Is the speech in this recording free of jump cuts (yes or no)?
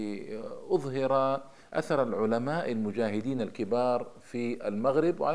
yes